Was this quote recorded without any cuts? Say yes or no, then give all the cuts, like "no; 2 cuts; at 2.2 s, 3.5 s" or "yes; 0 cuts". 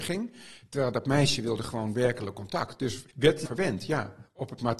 no; 2 cuts; at 3.1 s, 3.4 s